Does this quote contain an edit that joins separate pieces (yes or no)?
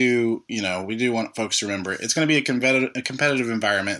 no